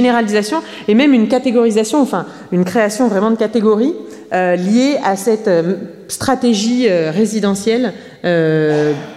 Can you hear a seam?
no; 0 cuts

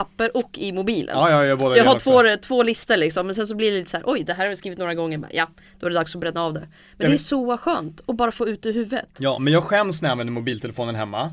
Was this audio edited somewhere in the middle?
no; 0 cuts

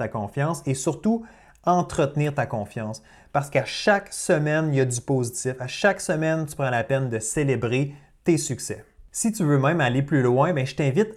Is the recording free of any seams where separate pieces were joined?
yes; 0 cuts

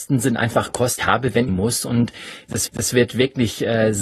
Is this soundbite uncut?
no; 3 cuts; at 1.0 s, 1.5 s, 2.7 s

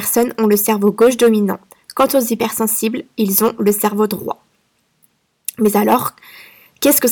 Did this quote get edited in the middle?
no; 0 cuts

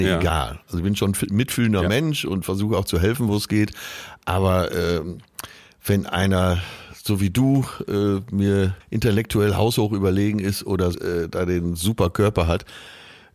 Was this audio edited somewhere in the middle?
yes; 2 cuts; at 8.8 s, 10.9 s

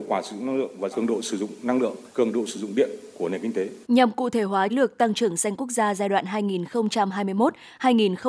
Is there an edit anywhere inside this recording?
yes; 4 cuts; at 0.9 s, 2.1 s, 3.8 s, 4.7 s

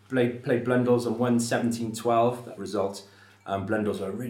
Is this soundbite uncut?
no; 1 cut; at 2.6 s

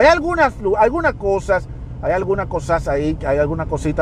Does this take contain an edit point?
no; 0 cuts

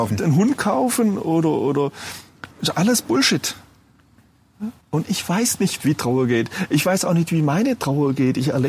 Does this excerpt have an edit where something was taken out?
yes; 2 cuts; at 2.5 s, 4.8 s

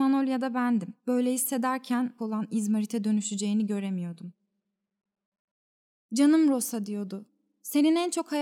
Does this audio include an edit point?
yes; 2 cuts; at 1.0 s, 2.2 s

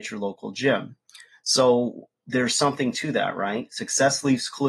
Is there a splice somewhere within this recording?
no; 0 cuts

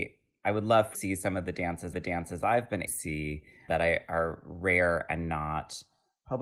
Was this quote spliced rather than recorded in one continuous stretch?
yes; 4 cuts; at 0.9 s, 1.9 s, 2.9 s, 3.7 s

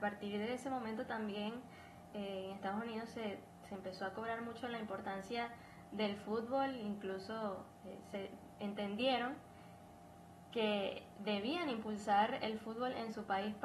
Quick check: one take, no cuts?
yes; 0 cuts

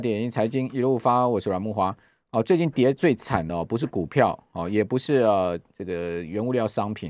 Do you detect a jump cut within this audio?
no; 0 cuts

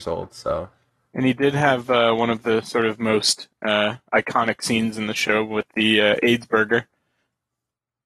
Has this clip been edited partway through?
no; 0 cuts

